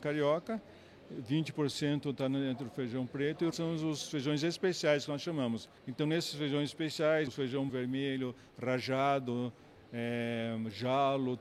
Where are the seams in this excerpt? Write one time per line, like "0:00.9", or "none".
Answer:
0:03.5
0:05.8
0:07.3
0:07.7